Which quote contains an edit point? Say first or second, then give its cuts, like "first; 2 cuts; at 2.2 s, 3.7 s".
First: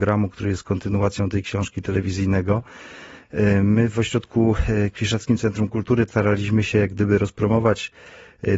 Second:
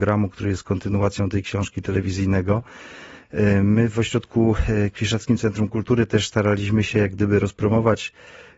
first; 1 cut; at 6.1 s